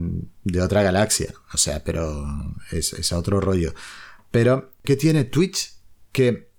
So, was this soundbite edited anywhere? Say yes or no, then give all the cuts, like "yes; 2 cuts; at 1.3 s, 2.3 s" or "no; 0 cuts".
yes; 1 cut; at 4.8 s